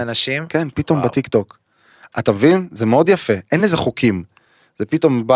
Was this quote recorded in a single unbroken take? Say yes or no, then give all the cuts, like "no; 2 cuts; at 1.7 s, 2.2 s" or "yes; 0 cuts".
yes; 0 cuts